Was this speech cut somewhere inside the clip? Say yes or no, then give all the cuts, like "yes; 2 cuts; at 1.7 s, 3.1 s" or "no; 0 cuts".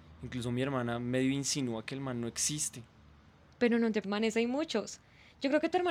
yes; 1 cut; at 4.0 s